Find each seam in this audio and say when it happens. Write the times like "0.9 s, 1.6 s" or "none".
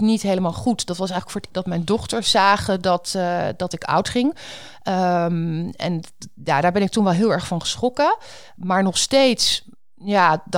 1.5 s